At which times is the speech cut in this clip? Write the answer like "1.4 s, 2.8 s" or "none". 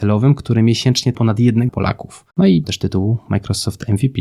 1.1 s, 1.7 s, 2.3 s, 2.6 s